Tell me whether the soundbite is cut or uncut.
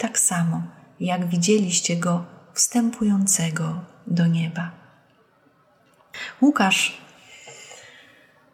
uncut